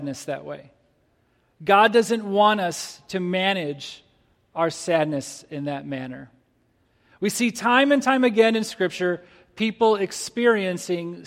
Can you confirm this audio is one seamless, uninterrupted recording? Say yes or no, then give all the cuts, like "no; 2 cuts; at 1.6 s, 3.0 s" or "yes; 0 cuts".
yes; 0 cuts